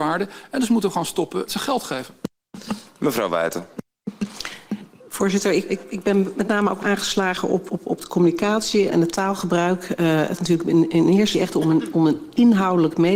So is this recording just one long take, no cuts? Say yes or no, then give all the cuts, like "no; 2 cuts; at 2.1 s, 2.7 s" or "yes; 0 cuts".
no; 7 cuts; at 1.5 s, 5.7 s, 6.8 s, 7.7 s, 8.9 s, 10.4 s, 11.3 s